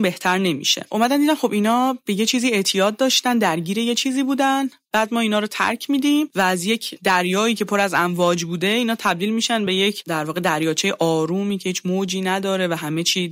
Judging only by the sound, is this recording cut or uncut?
uncut